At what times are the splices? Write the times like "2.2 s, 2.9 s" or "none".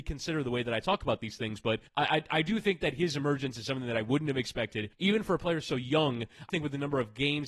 1.9 s, 4.9 s, 6.5 s